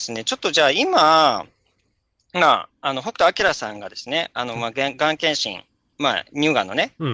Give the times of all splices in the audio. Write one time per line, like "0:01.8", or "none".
none